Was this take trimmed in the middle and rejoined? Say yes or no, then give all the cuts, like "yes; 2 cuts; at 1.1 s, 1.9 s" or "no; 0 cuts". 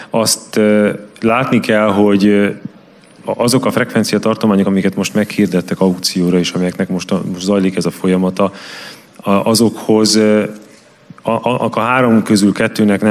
no; 0 cuts